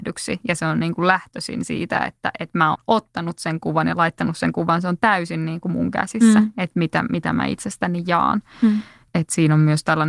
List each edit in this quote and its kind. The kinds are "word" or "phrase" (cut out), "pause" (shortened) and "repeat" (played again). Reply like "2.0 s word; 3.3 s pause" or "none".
2.7 s word